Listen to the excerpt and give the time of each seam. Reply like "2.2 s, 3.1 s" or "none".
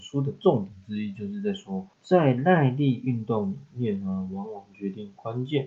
1.9 s